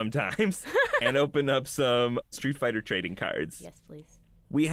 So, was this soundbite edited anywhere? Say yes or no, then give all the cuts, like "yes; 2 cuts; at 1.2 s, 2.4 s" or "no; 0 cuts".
no; 0 cuts